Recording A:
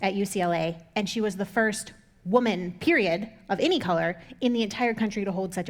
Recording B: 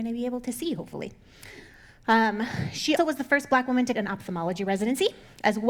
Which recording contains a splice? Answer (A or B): B